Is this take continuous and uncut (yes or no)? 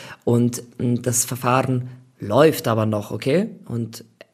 yes